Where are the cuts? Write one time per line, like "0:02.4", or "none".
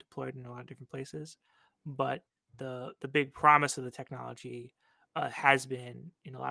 none